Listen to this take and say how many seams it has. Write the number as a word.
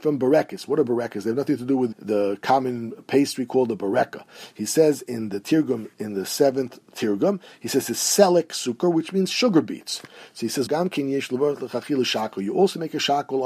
two